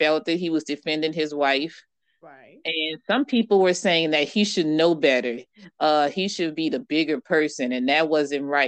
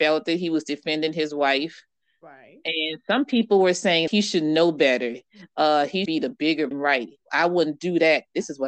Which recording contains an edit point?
second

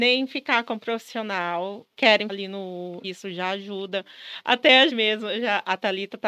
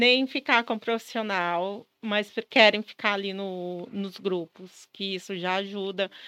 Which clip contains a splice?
first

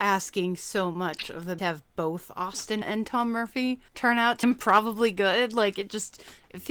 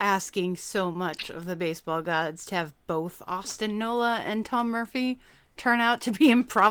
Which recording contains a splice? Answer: first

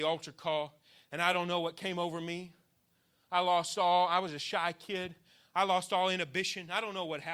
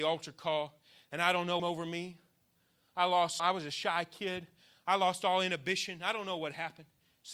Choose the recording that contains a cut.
second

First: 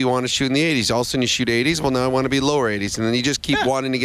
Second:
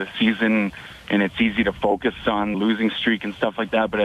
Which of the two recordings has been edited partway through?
second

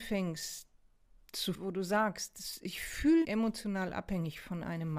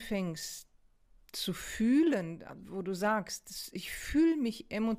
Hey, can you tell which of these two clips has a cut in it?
first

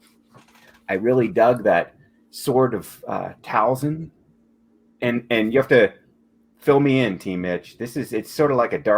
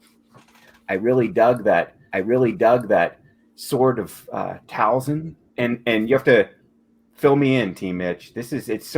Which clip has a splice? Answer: second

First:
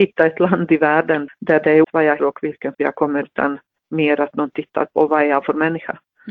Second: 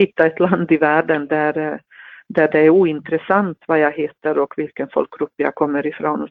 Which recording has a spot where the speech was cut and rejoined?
first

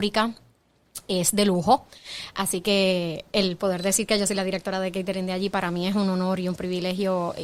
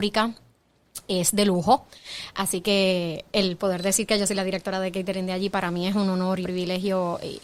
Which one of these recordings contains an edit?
second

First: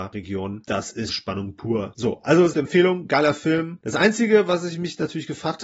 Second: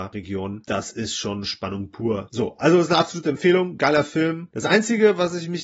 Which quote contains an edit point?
first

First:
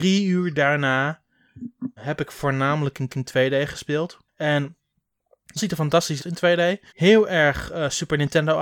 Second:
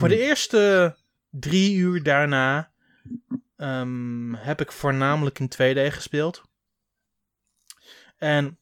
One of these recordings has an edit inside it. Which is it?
first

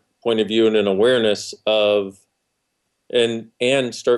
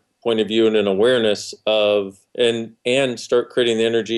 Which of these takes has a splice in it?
second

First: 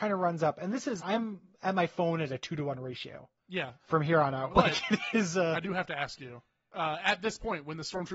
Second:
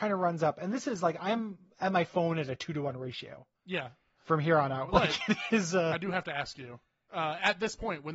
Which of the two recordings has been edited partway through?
first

